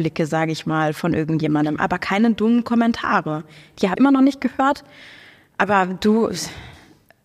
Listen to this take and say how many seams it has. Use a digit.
1